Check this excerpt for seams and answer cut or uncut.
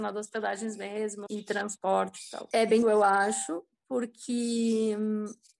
cut